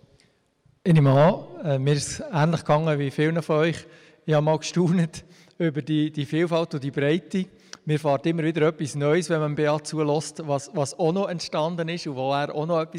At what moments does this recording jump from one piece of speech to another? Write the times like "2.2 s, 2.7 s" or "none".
none